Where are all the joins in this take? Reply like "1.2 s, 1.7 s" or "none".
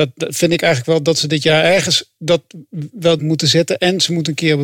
3.2 s